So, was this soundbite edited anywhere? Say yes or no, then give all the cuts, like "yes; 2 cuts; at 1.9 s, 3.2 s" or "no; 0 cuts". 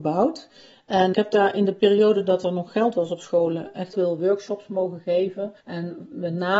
yes; 3 cuts; at 1.1 s, 3.9 s, 5.6 s